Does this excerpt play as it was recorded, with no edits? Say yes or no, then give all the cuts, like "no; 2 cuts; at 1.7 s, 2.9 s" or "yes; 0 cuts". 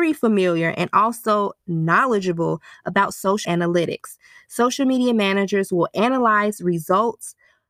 no; 1 cut; at 3.4 s